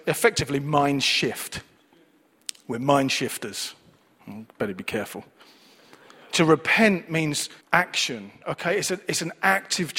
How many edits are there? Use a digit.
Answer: 2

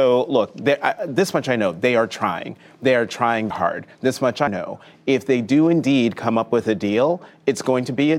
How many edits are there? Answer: 2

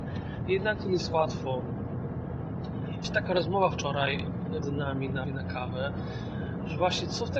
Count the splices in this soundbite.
4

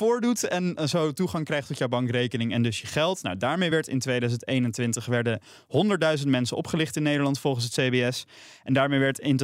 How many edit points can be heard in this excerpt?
0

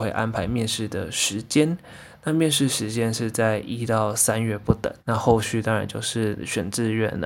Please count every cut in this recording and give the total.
1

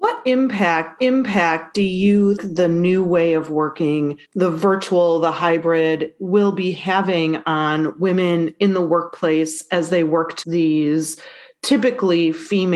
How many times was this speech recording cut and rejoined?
4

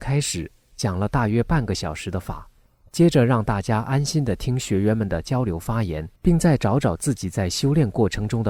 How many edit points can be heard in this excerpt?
1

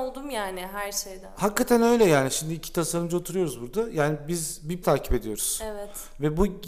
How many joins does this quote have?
1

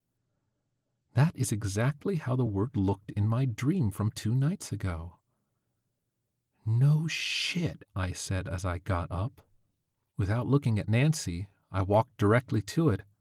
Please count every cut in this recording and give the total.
0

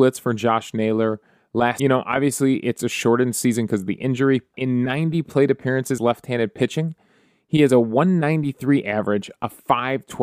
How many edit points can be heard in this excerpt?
3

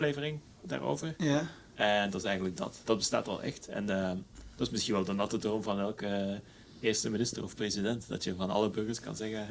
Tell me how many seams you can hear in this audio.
0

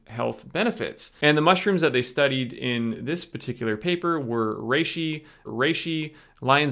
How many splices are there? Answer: 1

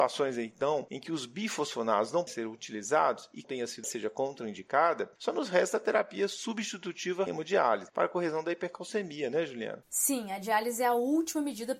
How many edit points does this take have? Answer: 4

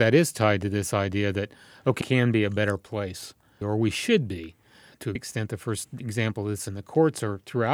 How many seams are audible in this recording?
3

